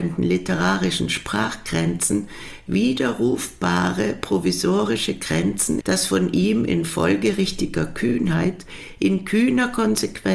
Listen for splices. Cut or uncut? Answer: cut